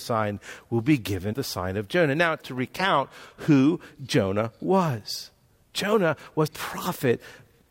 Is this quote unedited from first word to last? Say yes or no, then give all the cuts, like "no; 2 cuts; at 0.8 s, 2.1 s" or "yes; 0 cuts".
no; 3 cuts; at 1.3 s, 2.4 s, 6.5 s